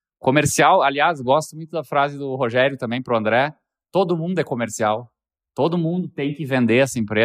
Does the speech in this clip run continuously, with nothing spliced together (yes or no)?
yes